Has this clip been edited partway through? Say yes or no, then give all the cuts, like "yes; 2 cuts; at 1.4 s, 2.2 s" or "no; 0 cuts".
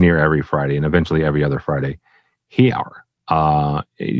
yes; 1 cut; at 2.7 s